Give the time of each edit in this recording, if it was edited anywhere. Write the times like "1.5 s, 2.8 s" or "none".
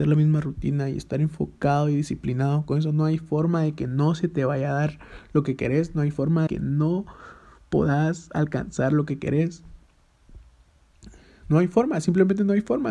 6.5 s